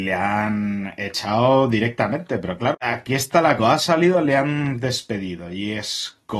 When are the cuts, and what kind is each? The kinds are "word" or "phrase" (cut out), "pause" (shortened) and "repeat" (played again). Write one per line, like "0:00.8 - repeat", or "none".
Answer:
0:02.7 - word
0:03.6 - phrase